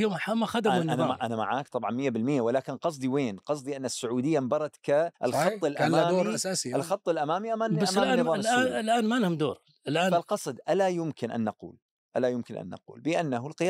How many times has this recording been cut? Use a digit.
1